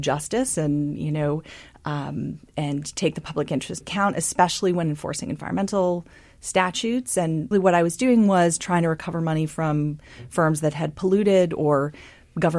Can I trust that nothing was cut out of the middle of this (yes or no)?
no